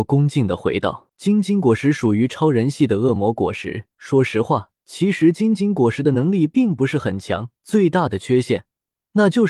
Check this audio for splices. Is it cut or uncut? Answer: cut